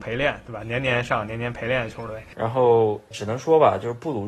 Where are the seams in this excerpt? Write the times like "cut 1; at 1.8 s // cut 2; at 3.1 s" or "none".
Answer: cut 1; at 3.1 s

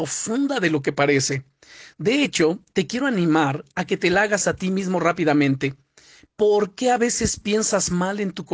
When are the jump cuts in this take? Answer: none

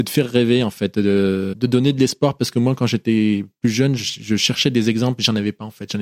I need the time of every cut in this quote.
none

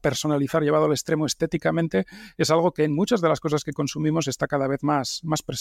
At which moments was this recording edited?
none

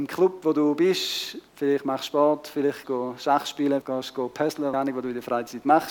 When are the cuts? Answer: cut 1; at 1.5 s // cut 2; at 2.8 s // cut 3; at 3.8 s // cut 4; at 4.7 s

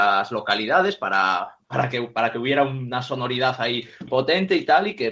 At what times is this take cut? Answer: cut 1; at 4.1 s

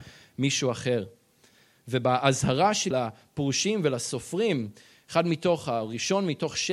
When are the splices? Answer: cut 1; at 2.9 s

